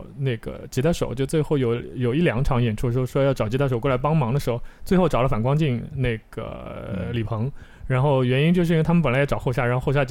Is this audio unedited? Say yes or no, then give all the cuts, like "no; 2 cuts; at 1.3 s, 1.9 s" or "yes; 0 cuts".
yes; 0 cuts